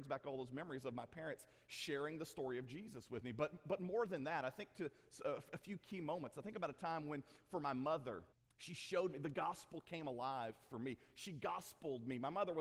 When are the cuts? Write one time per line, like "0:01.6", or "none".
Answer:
0:08.3